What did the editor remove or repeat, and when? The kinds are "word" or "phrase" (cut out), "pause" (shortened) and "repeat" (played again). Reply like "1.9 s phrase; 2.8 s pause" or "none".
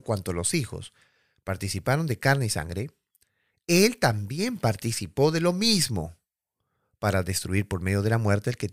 none